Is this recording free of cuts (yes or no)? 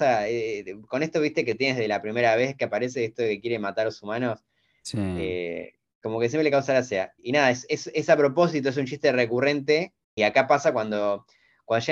yes